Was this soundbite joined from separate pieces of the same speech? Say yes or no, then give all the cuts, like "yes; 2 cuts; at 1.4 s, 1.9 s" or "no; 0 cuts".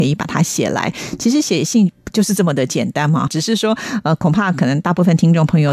yes; 1 cut; at 3.3 s